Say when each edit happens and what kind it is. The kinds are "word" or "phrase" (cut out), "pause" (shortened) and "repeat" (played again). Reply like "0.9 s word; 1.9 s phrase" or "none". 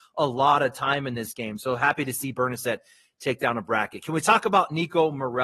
none